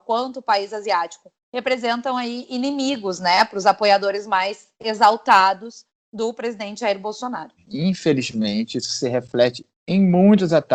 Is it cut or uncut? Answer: cut